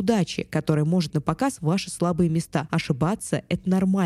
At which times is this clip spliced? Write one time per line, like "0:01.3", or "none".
0:01.1